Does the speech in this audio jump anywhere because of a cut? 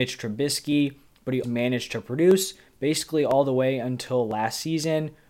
yes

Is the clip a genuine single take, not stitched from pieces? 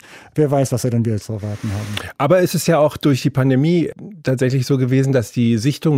yes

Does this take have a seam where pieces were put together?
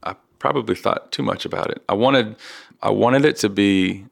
yes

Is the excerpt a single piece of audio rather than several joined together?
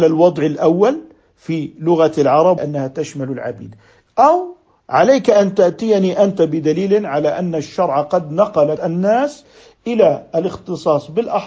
no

